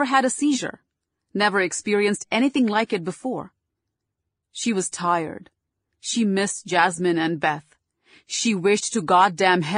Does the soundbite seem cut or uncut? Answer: uncut